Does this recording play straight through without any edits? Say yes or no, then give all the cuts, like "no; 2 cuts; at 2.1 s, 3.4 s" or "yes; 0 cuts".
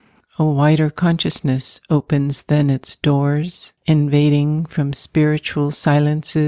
no; 1 cut; at 3.8 s